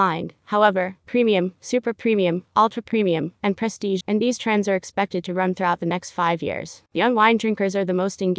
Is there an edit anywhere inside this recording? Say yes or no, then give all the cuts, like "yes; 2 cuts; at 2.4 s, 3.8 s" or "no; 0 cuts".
yes; 2 cuts; at 4.0 s, 6.9 s